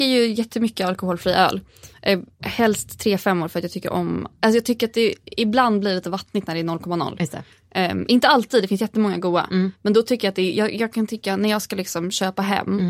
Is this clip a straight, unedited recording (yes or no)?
yes